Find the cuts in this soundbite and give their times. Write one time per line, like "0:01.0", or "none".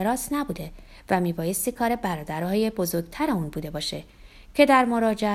none